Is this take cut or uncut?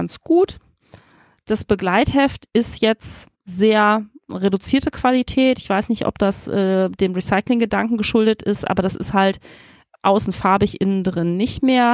cut